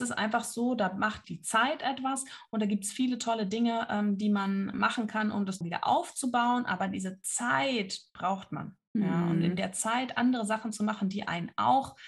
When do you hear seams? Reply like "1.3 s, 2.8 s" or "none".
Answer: 1.2 s, 4.7 s, 5.6 s